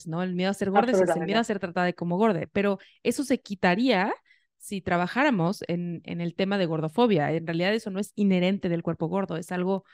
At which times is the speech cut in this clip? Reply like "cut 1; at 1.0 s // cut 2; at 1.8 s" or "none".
none